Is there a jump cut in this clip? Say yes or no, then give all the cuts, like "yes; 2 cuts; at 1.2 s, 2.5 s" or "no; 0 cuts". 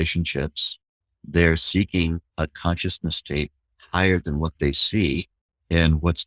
no; 0 cuts